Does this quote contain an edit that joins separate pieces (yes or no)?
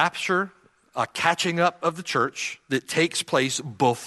no